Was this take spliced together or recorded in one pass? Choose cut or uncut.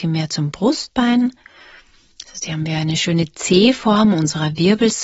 uncut